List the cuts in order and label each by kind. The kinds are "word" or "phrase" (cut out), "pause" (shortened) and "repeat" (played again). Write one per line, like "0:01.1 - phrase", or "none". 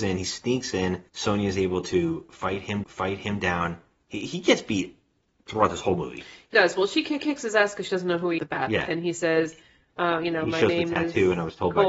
0:01.1 - pause
0:02.8 - repeat
0:06.5 - word
0:07.2 - repeat
0:08.4 - phrase